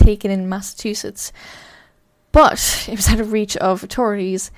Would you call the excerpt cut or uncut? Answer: uncut